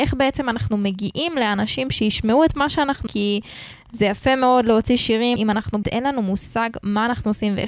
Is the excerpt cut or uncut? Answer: cut